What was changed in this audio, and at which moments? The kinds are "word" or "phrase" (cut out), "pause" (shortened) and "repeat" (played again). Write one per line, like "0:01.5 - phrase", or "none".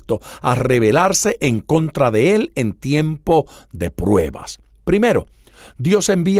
none

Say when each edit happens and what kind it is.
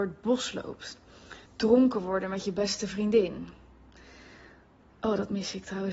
0:01.5 - pause

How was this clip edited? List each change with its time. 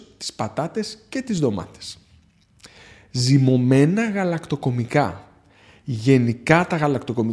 none

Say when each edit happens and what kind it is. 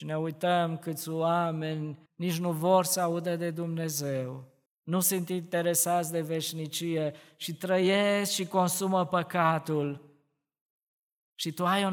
0:02.1 - pause
0:04.7 - pause

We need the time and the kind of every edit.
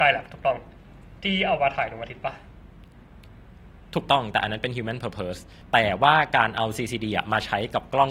0:01.2 - pause

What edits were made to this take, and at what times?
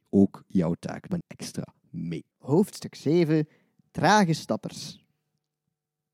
0:01.2 - word
0:02.3 - pause

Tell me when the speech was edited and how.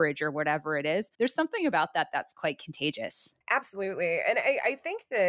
0:01.1 - pause
0:03.4 - pause

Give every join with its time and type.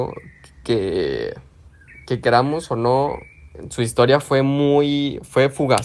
0:02.0 - pause

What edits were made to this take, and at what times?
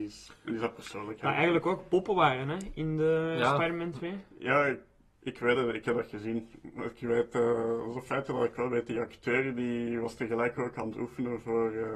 none

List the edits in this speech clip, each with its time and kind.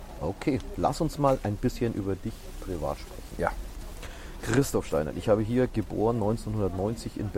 none

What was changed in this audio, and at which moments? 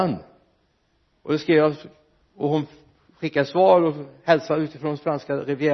none

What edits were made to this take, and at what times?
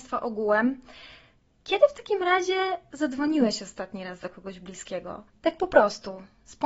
0:05.3 - pause

